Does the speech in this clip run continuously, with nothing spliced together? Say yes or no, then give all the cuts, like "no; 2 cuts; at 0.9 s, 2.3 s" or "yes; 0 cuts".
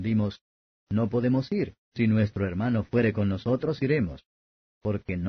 no; 1 cut; at 1.8 s